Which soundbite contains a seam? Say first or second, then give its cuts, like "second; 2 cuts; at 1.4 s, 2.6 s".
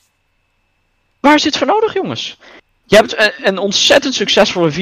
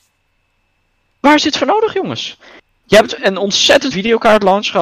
second; 2 cuts; at 3.2 s, 3.9 s